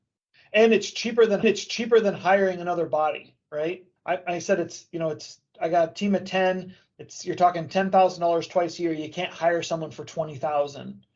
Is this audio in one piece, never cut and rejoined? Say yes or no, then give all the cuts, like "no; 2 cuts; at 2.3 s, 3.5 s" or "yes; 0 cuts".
no; 2 cuts; at 1.4 s, 4.0 s